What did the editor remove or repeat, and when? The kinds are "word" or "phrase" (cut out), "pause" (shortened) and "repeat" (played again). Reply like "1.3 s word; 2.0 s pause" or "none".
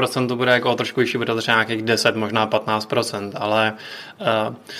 none